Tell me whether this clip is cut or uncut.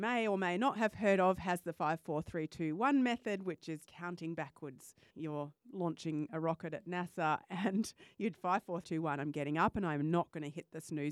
cut